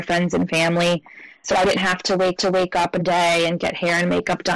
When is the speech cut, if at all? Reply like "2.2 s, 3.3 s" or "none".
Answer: 1.8 s, 2.4 s, 3.0 s